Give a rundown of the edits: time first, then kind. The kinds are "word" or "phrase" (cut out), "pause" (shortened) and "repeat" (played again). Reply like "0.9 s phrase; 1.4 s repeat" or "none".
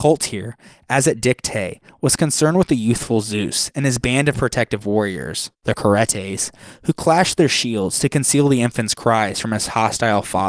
5.5 s pause